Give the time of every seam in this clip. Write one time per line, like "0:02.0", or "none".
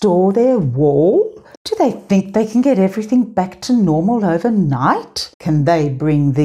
0:01.6
0:05.3